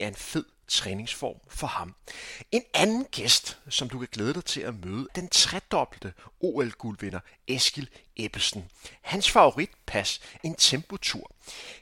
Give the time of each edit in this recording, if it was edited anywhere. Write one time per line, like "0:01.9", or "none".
0:05.1
0:10.4